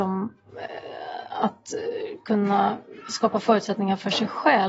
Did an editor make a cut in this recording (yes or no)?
no